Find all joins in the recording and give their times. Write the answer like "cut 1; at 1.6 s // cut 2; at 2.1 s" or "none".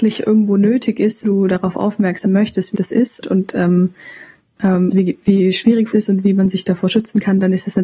cut 1; at 1.2 s // cut 2; at 2.2 s // cut 3; at 2.7 s // cut 4; at 3.2 s // cut 5; at 4.9 s // cut 6; at 5.9 s